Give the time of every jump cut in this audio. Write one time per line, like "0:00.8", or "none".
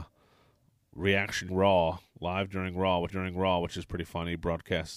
0:01.5
0:03.1